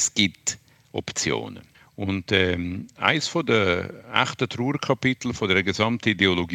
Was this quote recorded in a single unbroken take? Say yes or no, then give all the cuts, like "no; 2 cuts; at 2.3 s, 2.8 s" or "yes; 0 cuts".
no; 1 cut; at 1.7 s